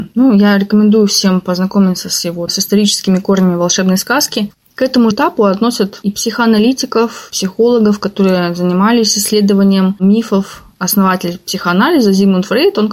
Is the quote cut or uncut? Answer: cut